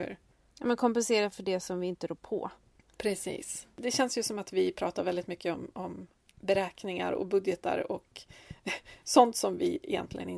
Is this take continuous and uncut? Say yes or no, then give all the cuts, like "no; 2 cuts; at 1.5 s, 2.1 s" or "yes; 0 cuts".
yes; 0 cuts